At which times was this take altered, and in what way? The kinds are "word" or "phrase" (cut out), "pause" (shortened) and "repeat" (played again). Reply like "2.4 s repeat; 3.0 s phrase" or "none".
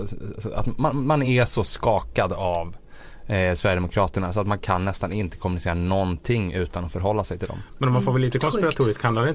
none